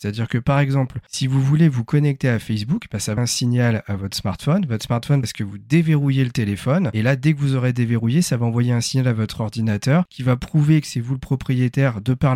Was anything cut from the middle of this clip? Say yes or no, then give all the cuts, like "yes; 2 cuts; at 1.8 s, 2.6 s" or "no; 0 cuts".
yes; 2 cuts; at 3.2 s, 5.2 s